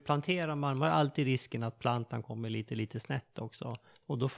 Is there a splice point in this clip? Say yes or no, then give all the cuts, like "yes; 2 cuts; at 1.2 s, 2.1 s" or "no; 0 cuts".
no; 0 cuts